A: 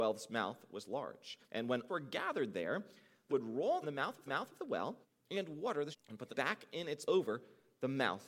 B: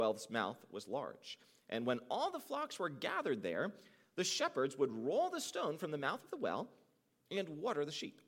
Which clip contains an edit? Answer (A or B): A